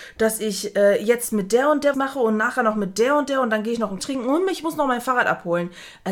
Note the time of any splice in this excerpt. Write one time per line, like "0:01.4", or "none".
0:01.9
0:04.0